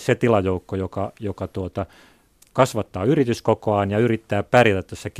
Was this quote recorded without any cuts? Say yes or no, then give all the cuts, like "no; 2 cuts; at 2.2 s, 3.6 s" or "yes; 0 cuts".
yes; 0 cuts